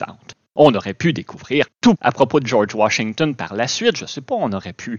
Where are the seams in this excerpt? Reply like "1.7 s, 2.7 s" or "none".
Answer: 1.9 s